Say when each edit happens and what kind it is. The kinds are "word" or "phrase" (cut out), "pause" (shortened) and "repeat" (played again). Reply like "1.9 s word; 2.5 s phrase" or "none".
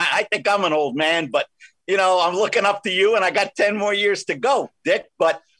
none